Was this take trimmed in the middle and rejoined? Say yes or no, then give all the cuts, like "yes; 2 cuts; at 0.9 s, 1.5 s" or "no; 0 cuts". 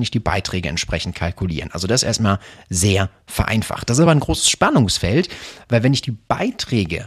no; 0 cuts